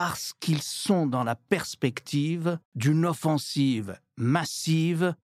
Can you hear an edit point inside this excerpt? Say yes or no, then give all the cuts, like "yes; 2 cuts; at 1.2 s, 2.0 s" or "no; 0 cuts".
yes; 1 cut; at 2.7 s